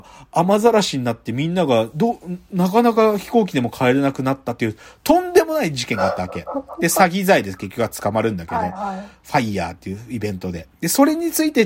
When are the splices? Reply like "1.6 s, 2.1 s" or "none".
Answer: none